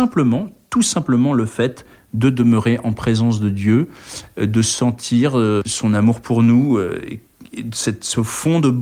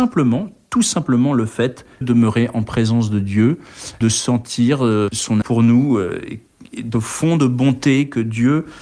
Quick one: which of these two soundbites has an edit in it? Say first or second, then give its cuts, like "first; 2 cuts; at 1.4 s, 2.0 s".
second; 4 cuts; at 2.0 s, 4.0 s, 5.4 s, 6.9 s